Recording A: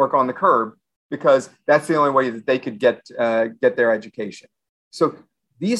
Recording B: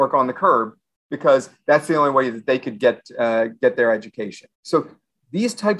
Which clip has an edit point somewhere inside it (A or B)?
B